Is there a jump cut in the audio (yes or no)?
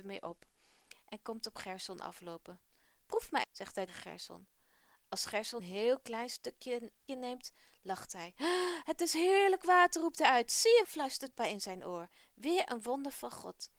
yes